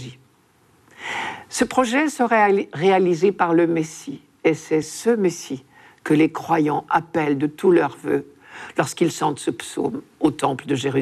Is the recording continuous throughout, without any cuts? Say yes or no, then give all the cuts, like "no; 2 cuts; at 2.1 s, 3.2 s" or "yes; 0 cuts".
yes; 0 cuts